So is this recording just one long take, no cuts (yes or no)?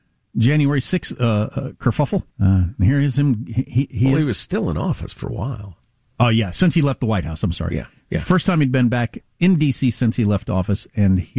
no